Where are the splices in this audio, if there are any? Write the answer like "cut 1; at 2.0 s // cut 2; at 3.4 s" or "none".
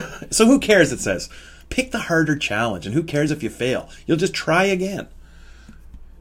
none